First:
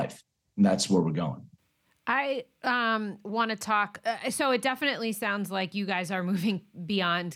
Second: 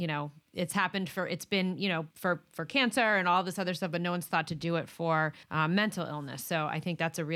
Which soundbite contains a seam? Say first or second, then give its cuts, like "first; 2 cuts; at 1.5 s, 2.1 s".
second; 2 cuts; at 2.1 s, 5.4 s